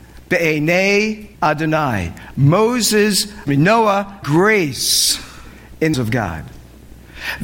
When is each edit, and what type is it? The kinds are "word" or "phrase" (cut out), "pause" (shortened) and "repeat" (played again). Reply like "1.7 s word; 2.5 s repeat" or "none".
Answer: 1.3 s pause; 3.5 s phrase; 4.2 s word; 5.9 s phrase